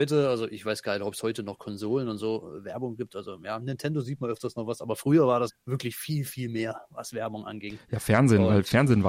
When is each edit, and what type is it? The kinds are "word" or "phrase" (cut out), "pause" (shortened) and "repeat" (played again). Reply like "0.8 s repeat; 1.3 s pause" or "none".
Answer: 5.5 s word